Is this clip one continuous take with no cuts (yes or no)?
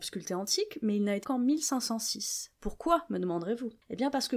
no